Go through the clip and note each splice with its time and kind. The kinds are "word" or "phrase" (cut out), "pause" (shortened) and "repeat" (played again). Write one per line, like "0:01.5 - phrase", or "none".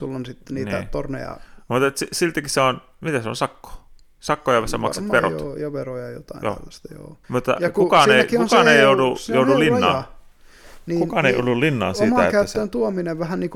0:07.2 - pause